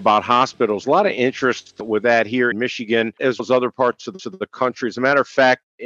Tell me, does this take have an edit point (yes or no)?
yes